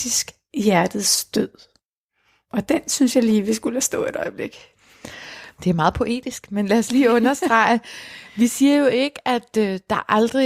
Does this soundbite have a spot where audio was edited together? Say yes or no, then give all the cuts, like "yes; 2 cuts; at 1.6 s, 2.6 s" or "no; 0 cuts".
no; 0 cuts